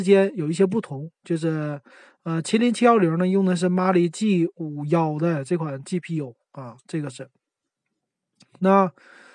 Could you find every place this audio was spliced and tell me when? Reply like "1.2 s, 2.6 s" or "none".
none